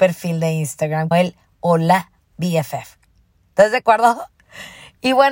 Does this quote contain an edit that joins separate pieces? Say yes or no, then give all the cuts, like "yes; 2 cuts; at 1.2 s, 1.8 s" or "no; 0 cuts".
yes; 1 cut; at 1.1 s